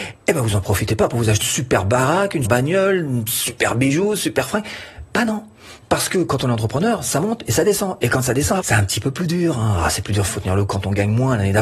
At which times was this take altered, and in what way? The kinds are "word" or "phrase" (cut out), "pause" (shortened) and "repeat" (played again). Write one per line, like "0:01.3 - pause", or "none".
0:01.4 - word
0:02.4 - word
0:08.6 - word
0:10.3 - word
0:10.7 - word